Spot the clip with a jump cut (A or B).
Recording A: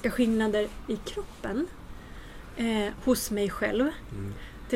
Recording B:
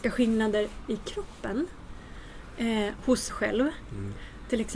B